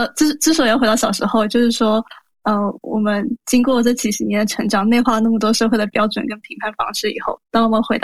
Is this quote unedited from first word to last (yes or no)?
yes